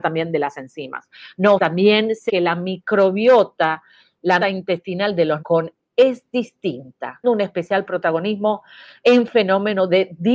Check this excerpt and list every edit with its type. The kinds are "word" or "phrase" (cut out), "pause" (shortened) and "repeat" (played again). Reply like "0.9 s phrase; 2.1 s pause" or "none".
1.6 s word; 2.3 s word; 4.4 s word; 5.4 s word; 5.9 s word; 7.2 s word